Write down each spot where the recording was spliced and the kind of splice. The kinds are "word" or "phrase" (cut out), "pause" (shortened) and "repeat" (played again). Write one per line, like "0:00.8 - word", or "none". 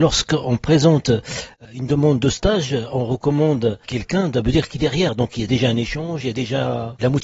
0:03.8 - pause
0:04.8 - phrase